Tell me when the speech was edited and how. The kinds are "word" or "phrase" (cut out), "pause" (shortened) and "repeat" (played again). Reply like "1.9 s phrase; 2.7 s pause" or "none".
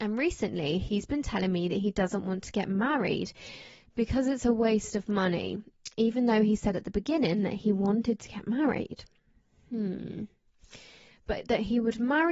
none